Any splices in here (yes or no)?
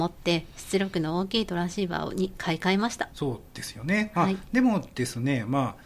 yes